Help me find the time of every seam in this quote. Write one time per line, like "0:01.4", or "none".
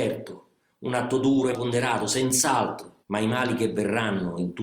0:01.5
0:03.0